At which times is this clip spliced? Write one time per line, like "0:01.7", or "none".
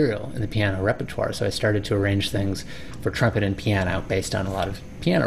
none